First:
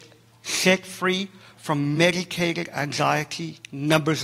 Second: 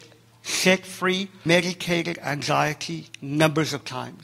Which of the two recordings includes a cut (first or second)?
second